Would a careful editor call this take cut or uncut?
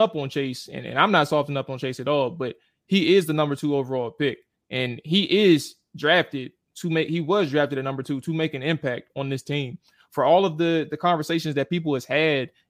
uncut